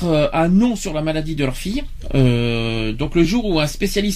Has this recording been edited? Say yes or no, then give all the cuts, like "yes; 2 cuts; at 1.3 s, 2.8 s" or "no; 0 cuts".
no; 0 cuts